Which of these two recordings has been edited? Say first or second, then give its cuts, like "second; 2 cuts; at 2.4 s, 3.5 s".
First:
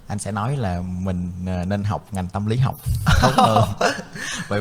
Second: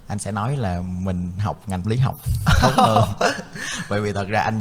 second; 2 cuts; at 1.4 s, 1.8 s